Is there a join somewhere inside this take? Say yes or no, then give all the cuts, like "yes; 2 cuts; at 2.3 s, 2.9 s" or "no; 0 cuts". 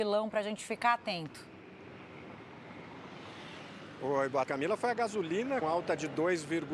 yes; 2 cuts; at 4.5 s, 5.6 s